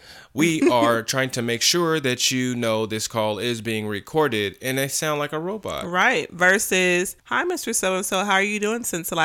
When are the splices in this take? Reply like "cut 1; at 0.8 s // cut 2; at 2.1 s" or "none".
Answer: cut 1; at 7.2 s